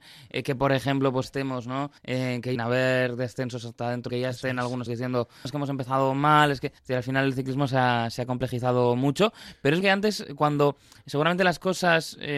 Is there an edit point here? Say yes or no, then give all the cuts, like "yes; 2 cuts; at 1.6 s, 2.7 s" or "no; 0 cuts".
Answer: yes; 8 cuts; at 1.2 s, 2.0 s, 2.6 s, 4.1 s, 4.9 s, 5.4 s, 6.8 s, 9.8 s